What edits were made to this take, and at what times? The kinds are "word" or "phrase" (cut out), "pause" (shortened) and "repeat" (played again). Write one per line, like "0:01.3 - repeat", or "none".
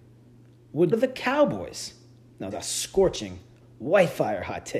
0:00.9 - word
0:02.5 - phrase